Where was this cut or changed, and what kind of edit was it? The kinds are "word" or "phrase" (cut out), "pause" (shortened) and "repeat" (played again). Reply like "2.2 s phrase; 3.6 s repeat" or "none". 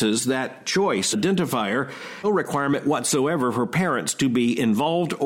1.1 s phrase; 2.2 s phrase